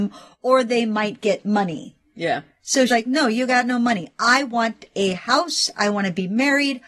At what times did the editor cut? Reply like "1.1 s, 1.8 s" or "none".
2.9 s

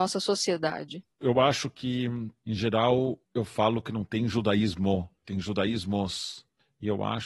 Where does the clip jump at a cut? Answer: 1.1 s, 5.2 s

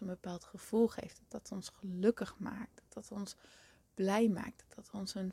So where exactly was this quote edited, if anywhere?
none

